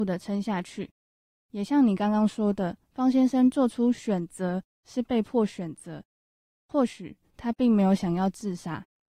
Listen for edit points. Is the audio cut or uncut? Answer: uncut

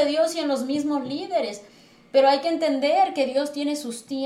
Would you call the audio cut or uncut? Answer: uncut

